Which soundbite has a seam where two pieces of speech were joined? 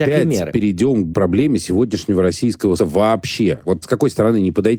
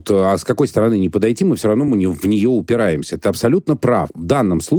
first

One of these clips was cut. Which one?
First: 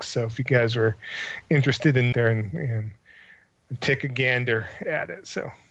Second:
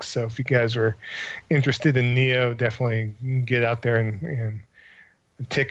first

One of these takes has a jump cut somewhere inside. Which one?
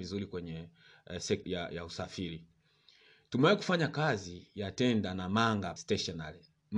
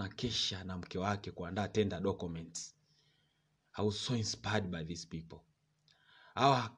first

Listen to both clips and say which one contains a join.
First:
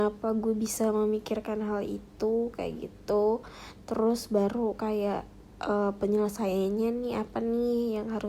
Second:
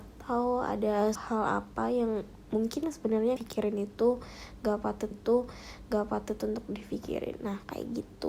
second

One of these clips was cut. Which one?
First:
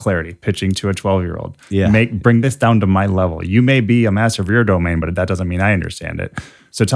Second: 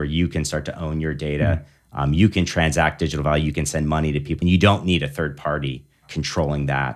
second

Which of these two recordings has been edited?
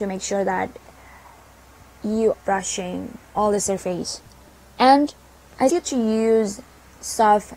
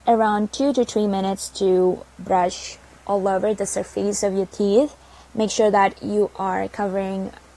first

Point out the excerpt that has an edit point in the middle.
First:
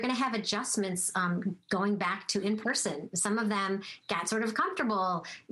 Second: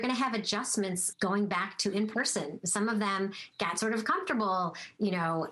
second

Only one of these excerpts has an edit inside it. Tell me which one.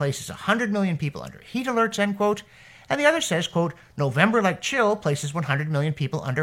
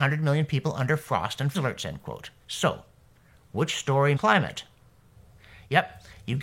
second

